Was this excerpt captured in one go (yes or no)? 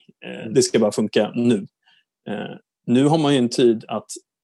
yes